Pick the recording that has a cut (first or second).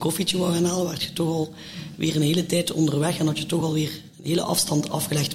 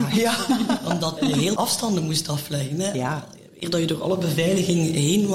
second